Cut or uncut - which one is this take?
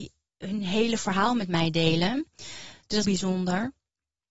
cut